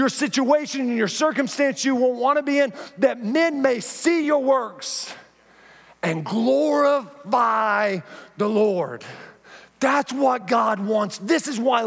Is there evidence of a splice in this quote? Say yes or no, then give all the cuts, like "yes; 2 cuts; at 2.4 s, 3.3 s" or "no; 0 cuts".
no; 0 cuts